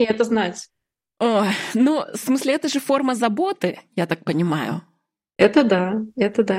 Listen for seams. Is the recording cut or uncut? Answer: uncut